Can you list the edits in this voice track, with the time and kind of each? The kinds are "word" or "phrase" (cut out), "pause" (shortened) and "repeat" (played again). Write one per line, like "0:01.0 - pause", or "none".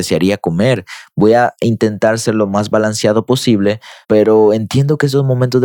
0:04.0 - pause